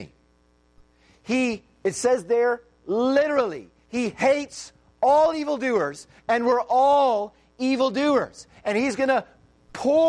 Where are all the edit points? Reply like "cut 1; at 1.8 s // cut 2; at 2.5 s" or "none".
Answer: none